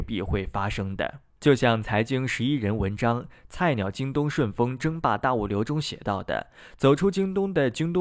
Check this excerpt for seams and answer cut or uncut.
cut